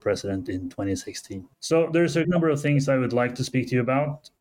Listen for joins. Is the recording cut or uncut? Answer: cut